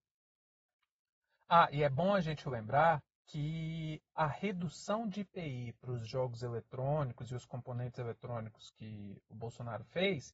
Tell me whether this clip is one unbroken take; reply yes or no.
no